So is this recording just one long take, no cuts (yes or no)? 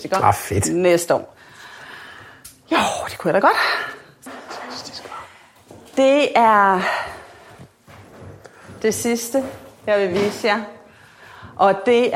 yes